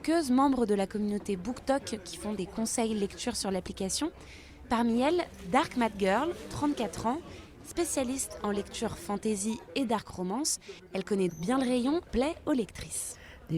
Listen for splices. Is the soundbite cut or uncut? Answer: cut